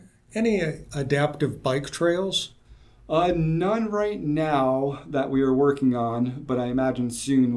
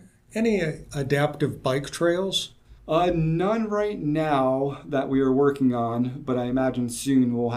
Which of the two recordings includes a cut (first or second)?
second